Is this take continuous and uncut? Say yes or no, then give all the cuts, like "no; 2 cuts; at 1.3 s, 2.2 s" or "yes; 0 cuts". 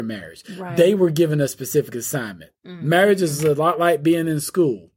no; 1 cut; at 2.6 s